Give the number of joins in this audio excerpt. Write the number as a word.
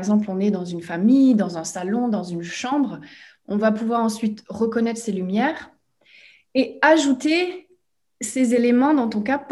zero